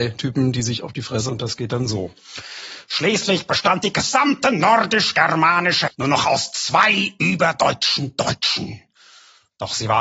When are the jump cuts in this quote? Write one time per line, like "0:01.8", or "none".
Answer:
0:01.3
0:05.9